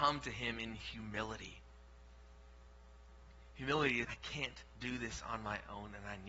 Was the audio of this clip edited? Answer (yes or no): yes